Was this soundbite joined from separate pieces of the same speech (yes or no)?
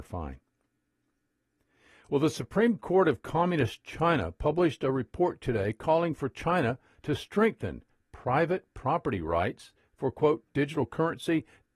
no